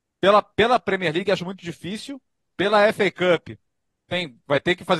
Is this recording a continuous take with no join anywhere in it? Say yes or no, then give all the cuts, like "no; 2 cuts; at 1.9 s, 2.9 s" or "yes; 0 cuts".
yes; 0 cuts